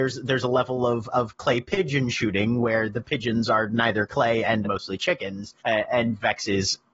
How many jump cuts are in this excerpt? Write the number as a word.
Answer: two